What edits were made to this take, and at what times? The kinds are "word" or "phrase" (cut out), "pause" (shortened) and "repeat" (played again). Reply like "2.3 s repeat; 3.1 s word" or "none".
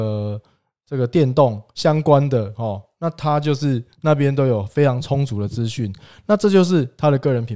none